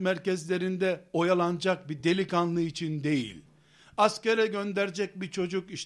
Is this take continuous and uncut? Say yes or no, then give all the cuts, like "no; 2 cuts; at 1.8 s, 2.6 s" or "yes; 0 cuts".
yes; 0 cuts